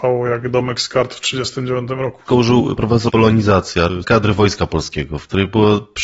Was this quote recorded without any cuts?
no; 3 cuts; at 2.8 s, 3.1 s, 4.0 s

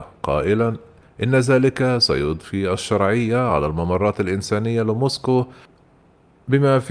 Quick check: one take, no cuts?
yes; 0 cuts

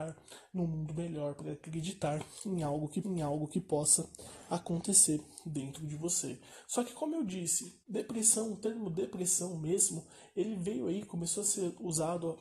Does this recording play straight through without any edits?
no; 2 cuts; at 3.0 s, 7.8 s

